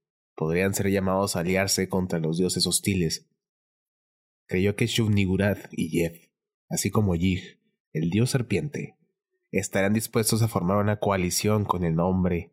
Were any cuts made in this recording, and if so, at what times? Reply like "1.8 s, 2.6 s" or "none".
5.7 s